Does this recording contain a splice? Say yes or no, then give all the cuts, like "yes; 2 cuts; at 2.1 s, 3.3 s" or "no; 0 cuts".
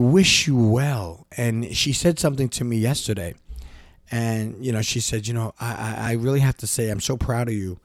no; 0 cuts